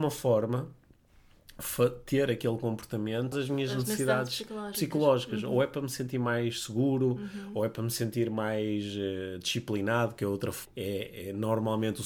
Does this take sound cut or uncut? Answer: cut